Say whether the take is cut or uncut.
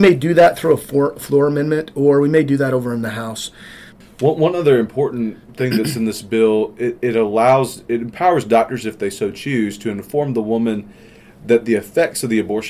uncut